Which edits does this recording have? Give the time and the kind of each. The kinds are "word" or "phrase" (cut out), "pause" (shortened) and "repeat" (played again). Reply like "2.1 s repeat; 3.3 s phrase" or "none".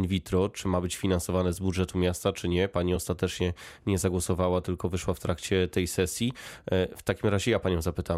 none